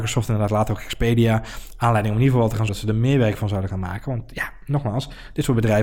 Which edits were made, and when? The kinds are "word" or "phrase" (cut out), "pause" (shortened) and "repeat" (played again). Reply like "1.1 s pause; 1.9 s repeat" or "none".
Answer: 2.7 s word